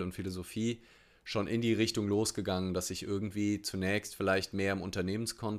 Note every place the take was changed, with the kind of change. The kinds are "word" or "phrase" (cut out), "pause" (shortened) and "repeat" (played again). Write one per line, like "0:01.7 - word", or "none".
none